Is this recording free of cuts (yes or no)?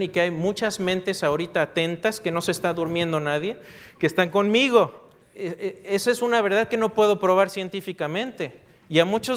yes